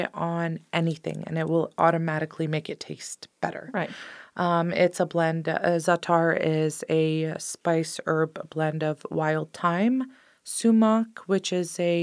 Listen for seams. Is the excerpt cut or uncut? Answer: uncut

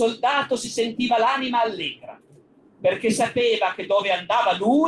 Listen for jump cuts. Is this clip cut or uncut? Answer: uncut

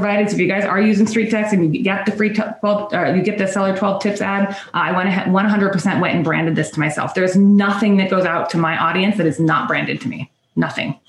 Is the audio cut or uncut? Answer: uncut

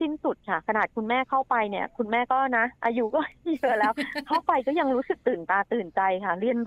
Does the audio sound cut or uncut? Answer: cut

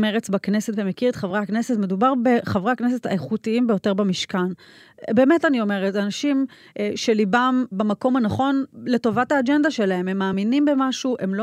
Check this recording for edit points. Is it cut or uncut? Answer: uncut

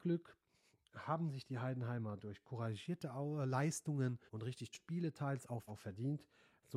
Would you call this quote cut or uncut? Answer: cut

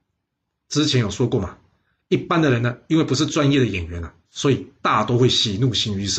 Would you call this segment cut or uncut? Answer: cut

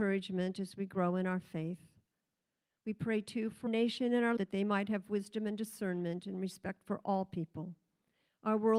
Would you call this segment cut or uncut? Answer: cut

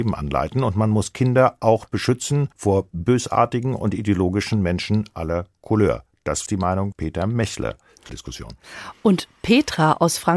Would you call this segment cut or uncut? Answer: cut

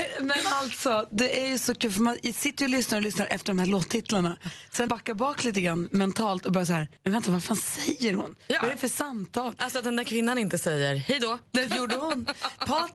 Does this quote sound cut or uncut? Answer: cut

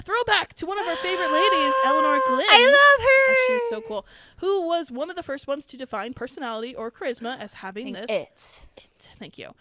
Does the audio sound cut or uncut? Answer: uncut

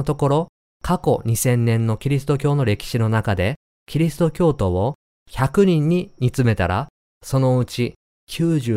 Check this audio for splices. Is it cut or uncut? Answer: uncut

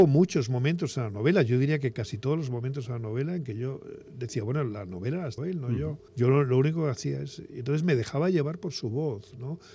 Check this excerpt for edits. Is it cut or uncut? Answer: cut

